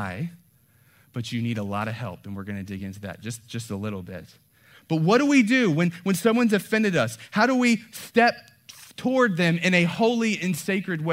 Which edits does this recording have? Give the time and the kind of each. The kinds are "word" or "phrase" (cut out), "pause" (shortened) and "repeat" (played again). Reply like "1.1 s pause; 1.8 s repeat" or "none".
none